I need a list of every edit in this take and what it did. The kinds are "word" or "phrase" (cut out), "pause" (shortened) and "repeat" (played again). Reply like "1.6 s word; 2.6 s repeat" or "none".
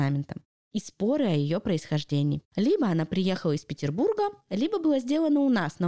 2.5 s pause